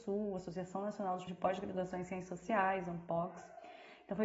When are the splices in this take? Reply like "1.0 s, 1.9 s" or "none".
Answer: 1.3 s